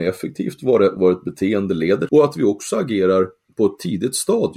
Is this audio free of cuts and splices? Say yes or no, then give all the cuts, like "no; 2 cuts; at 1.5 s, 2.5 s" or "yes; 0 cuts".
no; 2 cuts; at 1.0 s, 2.1 s